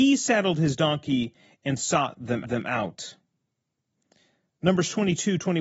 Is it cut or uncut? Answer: cut